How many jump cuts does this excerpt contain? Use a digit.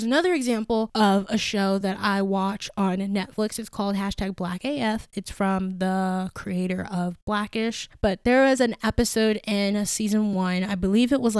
0